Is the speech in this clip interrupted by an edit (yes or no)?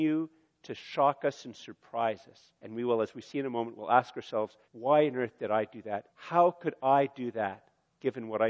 yes